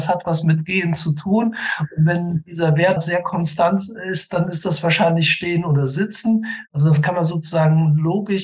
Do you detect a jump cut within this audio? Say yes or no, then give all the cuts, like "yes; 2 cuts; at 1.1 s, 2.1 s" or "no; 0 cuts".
yes; 1 cut; at 3.0 s